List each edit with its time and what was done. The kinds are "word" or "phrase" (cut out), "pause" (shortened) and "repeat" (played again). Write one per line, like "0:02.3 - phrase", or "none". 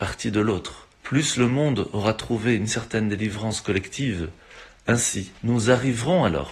0:00.9 - pause
0:05.4 - pause